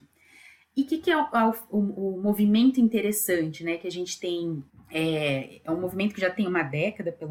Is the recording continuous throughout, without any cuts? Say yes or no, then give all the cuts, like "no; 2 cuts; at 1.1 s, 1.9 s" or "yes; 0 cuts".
no; 1 cut; at 4.7 s